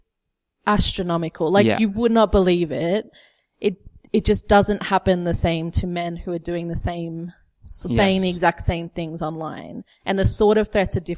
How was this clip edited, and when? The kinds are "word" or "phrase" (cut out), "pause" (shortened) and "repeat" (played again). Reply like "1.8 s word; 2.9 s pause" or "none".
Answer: none